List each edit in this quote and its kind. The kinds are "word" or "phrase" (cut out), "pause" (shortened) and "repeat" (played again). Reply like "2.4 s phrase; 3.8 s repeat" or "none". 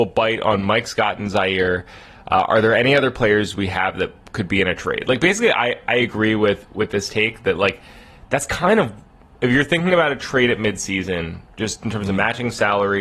none